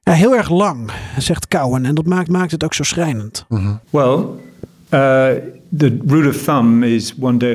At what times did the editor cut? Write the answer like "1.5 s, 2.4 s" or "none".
2.3 s, 3.8 s